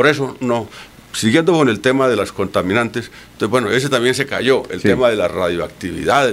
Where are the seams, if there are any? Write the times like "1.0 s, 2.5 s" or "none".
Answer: none